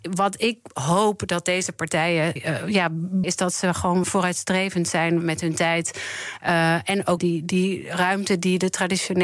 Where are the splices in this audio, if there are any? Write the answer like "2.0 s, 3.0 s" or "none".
2.4 s, 3.2 s, 4.0 s, 5.2 s, 7.2 s